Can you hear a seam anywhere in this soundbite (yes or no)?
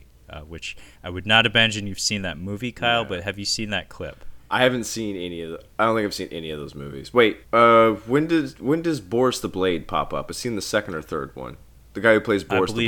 yes